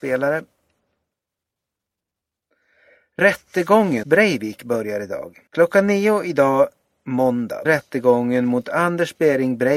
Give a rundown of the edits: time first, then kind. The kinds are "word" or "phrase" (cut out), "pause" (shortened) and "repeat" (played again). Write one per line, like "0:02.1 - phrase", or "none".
0:04.0 - word
0:05.5 - pause
0:07.6 - word